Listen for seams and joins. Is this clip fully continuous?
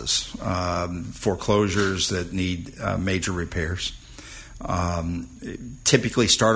yes; 0 cuts

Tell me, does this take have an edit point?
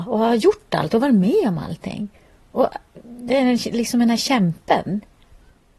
no; 0 cuts

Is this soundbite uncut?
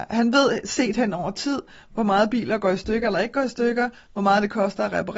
yes; 0 cuts

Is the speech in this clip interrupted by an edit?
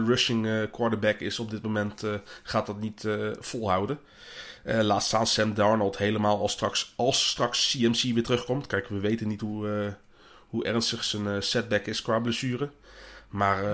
no; 0 cuts

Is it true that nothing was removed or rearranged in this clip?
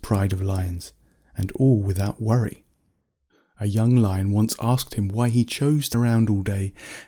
no; 1 cut; at 5.9 s

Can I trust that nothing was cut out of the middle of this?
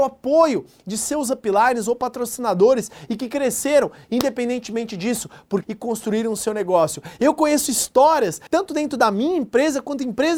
no; 1 cut; at 5.6 s

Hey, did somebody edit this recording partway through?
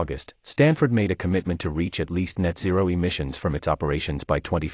no; 0 cuts

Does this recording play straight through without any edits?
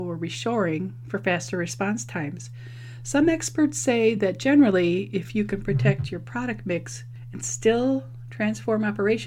yes; 0 cuts

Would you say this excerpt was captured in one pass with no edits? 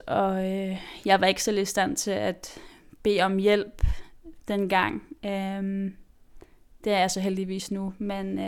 yes; 0 cuts

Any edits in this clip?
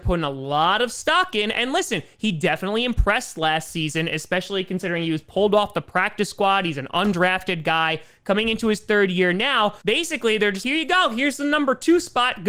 yes; 2 cuts; at 9.8 s, 10.6 s

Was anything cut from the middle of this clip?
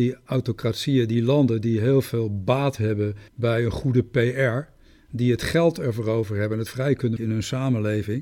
yes; 3 cuts; at 3.3 s, 6.7 s, 7.2 s

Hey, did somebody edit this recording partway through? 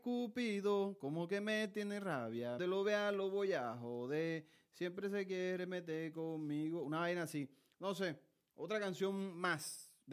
yes; 1 cut; at 2.6 s

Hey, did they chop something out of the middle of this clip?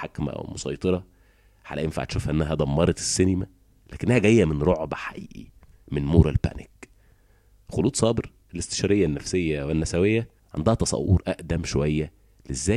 no; 0 cuts

